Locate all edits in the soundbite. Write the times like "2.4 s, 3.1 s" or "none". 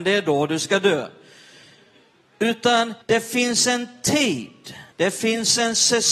3.0 s, 4.9 s